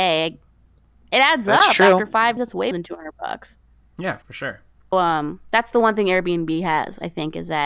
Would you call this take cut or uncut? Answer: cut